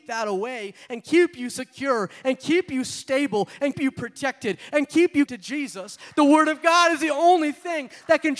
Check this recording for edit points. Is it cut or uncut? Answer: cut